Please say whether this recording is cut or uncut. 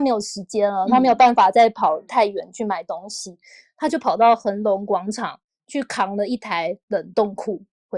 uncut